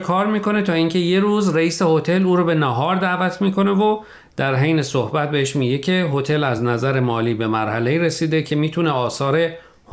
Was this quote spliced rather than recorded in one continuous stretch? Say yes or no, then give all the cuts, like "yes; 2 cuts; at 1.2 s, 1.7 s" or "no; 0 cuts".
no; 0 cuts